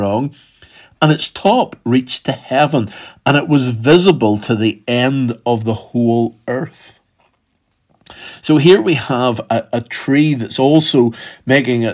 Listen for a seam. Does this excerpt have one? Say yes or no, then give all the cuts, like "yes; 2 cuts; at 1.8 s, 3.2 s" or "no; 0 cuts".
no; 0 cuts